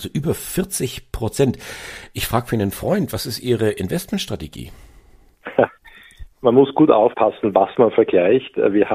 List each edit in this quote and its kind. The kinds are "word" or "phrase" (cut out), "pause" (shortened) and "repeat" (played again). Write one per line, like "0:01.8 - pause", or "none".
0:06.3 - pause